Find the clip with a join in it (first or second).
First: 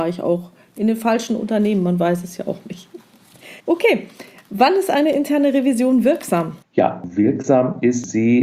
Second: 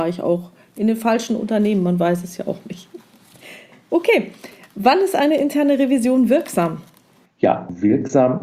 first